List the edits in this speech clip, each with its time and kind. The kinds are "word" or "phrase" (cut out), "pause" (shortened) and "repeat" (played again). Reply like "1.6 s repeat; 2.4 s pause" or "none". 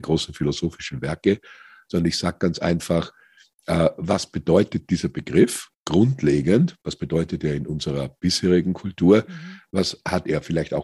none